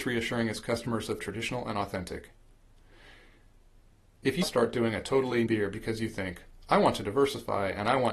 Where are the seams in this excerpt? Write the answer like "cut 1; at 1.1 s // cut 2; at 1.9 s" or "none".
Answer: cut 1; at 1.2 s // cut 2; at 4.4 s // cut 3; at 5.5 s